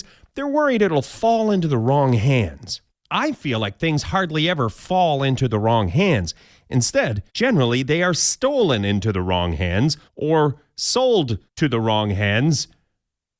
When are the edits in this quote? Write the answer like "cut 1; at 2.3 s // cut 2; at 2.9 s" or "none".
cut 1; at 2.9 s // cut 2; at 7.3 s // cut 3; at 10.1 s // cut 4; at 11.5 s